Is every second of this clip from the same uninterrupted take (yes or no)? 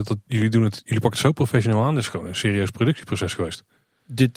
yes